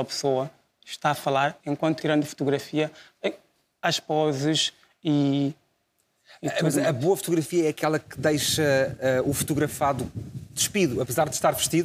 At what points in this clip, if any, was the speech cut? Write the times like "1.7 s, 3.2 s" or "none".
1.6 s, 2.0 s